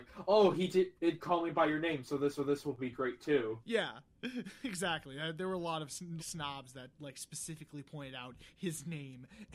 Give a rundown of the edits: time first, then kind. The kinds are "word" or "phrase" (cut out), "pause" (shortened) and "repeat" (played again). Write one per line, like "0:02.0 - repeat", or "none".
0:01.0 - pause
0:02.4 - repeat
0:06.2 - word